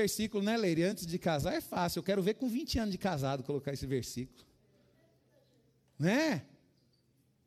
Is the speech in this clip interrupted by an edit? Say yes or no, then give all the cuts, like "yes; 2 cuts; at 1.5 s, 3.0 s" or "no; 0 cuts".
no; 0 cuts